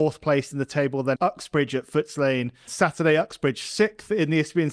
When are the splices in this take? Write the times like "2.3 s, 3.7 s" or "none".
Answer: 1.1 s, 2.7 s

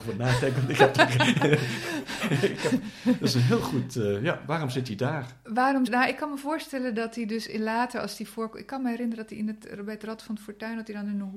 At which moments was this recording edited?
5.9 s

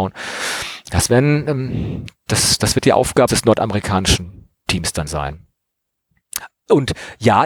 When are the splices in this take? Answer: 3.3 s, 4.6 s, 5.1 s

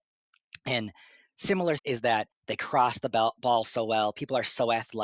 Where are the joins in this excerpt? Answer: 1.8 s, 2.3 s

